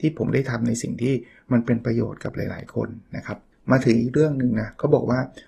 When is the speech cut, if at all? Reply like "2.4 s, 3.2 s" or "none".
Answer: 3.5 s